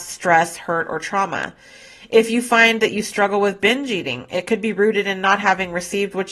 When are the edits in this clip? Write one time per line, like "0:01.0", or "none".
none